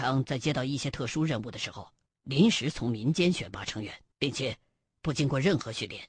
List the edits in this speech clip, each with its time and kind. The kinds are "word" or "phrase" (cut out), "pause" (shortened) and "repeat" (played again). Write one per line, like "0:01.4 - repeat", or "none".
0:02.1 - pause
0:04.1 - pause